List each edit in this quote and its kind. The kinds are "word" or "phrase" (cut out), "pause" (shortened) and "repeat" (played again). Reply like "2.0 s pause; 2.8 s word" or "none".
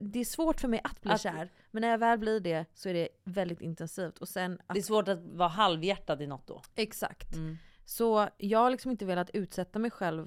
none